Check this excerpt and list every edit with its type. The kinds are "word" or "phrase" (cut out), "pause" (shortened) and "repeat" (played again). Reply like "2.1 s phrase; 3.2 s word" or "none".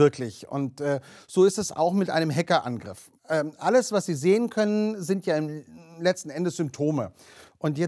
3.2 s pause